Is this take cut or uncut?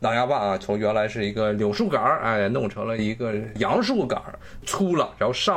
uncut